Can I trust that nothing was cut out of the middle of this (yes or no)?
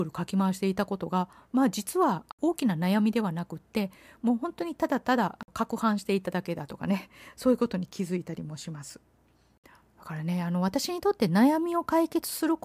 yes